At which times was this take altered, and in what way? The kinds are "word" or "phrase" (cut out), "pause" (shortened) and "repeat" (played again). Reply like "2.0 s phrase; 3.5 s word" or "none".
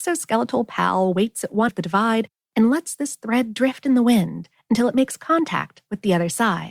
1.7 s word